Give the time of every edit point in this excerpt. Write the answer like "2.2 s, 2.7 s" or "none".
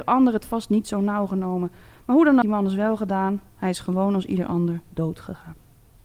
2.4 s